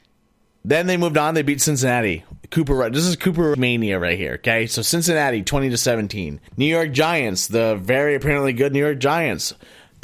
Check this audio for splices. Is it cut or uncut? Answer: cut